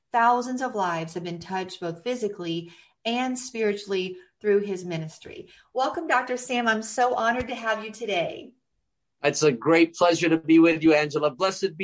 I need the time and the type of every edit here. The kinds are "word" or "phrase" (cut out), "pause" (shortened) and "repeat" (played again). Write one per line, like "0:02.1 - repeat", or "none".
none